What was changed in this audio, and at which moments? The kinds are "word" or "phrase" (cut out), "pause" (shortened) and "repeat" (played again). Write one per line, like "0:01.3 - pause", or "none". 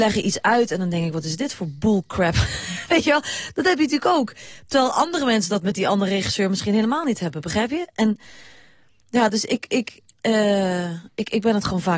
0:10.1 - pause

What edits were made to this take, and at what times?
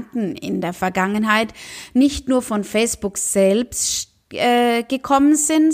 none

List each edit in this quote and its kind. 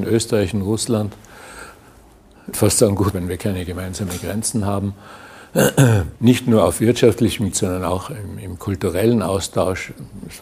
0:02.5 - phrase
0:03.1 - phrase
0:06.2 - pause
0:07.5 - word

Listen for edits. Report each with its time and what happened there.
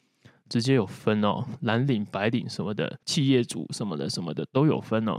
0:03.0 - pause

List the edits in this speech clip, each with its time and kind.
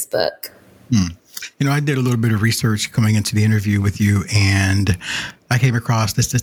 none

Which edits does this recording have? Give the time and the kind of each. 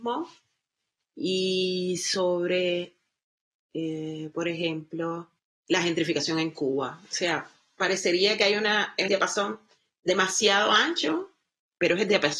0:05.4 - pause
0:09.1 - phrase

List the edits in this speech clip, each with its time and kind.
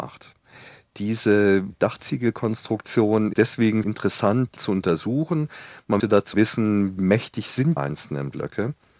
0:03.3 - word
0:03.8 - word
0:04.6 - word
0:06.0 - word
0:06.3 - word
0:07.0 - word
0:07.8 - word

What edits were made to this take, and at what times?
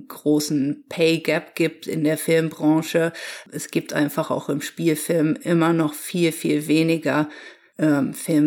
none

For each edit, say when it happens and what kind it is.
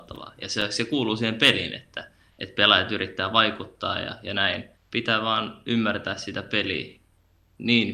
none

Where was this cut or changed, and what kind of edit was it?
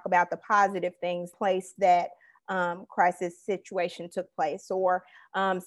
0:01.3 - phrase
0:01.8 - word

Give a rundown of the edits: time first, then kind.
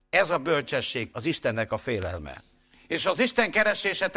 0:01.1 - word
0:02.6 - pause

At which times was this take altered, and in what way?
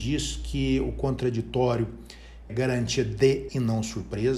0:02.5 - word
0:03.5 - word

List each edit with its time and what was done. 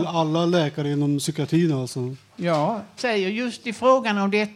0:03.0 - word

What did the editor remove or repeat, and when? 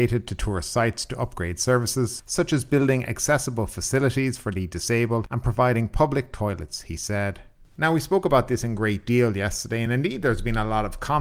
none

